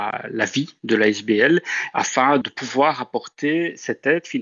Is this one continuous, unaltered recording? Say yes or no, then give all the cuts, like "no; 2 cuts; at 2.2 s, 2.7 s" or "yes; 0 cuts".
no; 1 cut; at 2.4 s